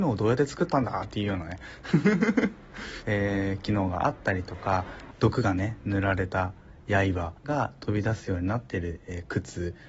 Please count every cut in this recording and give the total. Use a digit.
2